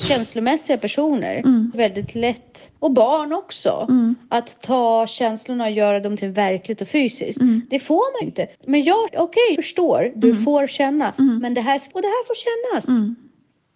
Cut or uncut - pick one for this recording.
cut